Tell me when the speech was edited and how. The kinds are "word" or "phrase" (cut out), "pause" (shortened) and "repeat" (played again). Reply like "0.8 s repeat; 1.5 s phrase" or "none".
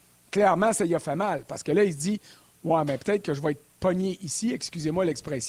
none

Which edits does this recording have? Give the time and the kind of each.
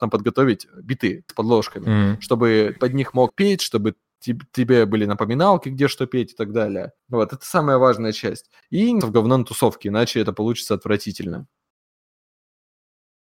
1.3 s word; 2.8 s word; 3.3 s word; 7.0 s pause; 9.0 s word

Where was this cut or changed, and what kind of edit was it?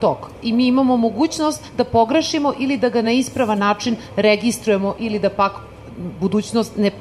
none

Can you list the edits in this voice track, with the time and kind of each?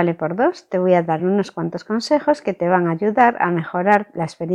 none

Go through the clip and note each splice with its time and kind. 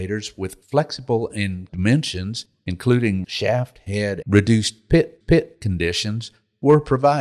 1.7 s word; 3.2 s word; 4.2 s word; 5.2 s repeat

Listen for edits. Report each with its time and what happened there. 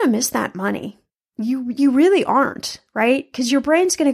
none

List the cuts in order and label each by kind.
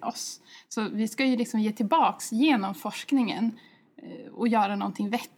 none

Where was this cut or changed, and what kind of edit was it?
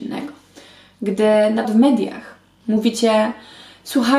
1.6 s word

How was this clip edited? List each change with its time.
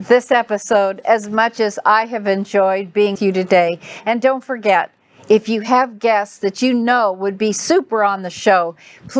3.1 s word

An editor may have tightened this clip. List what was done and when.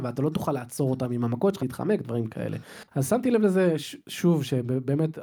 1.6 s phrase; 2.9 s pause

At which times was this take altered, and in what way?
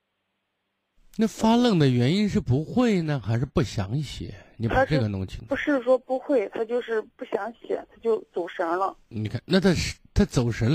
7.1 s pause; 9.0 s pause

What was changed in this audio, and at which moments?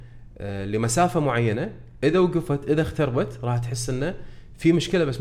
none

